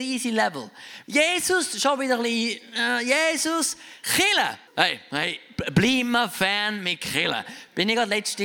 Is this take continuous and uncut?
no; 1 cut; at 4.7 s

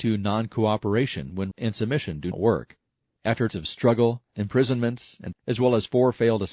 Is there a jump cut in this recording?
yes; 5 cuts; at 1.5 s, 2.3 s, 3.5 s, 4.3 s, 5.3 s

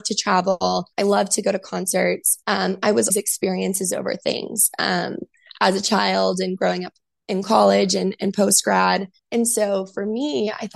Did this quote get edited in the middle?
yes; 4 cuts; at 0.9 s, 2.4 s, 3.1 s, 9.2 s

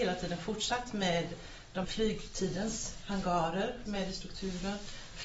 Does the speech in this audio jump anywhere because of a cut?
yes; 2 cuts; at 1.8 s, 3.9 s

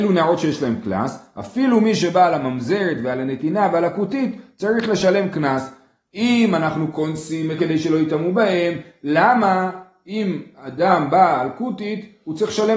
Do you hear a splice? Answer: yes; 1 cut; at 7.6 s

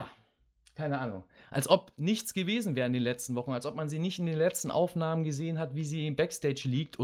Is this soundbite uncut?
yes; 0 cuts

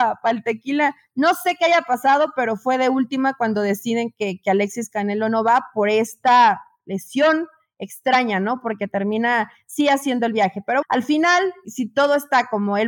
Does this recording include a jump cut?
yes; 2 cuts; at 10.8 s, 11.6 s

